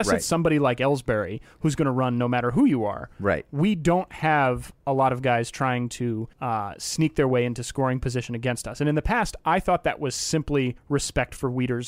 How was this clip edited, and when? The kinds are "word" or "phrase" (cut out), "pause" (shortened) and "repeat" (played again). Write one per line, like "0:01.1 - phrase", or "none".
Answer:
0:06.3 - pause
0:10.8 - pause